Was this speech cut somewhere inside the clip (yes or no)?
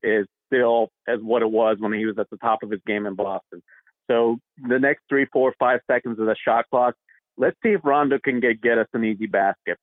no